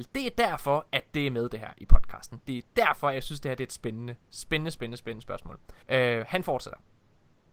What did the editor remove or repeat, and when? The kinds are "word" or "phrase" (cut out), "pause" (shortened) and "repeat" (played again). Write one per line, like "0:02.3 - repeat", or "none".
0:05.8 - pause